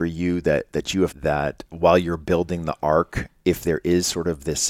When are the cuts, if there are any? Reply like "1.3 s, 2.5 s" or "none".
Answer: 1.1 s